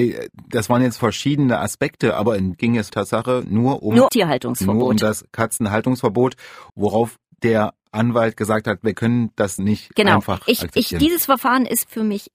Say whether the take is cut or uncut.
cut